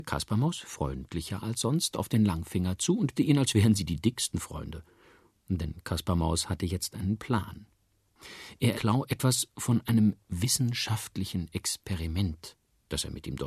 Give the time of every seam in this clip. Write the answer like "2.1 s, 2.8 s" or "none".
3.1 s, 8.7 s